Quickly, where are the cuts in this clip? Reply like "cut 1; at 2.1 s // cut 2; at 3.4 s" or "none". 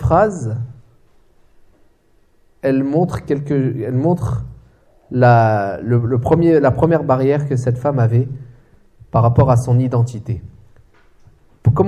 none